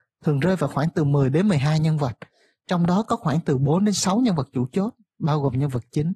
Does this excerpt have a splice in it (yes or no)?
no